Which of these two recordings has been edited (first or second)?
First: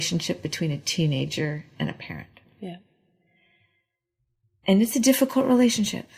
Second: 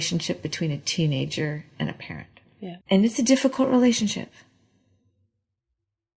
second